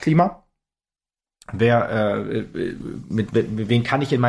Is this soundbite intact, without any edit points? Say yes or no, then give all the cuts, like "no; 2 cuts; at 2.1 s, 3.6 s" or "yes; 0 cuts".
yes; 0 cuts